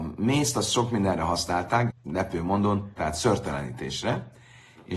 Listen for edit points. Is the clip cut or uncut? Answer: cut